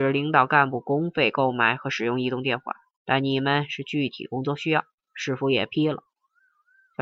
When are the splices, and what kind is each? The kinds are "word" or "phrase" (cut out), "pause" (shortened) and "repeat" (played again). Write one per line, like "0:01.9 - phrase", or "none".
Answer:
none